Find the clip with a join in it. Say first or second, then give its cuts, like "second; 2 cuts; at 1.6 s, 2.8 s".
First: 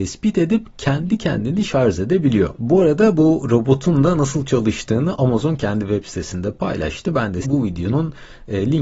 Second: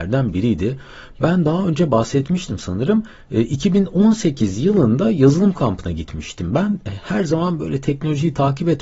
first; 1 cut; at 7.4 s